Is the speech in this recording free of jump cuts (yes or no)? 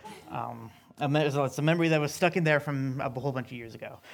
yes